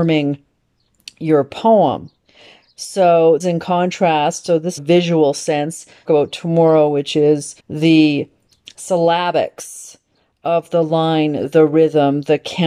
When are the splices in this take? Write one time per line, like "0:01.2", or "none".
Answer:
0:03.4
0:04.8
0:06.1
0:07.6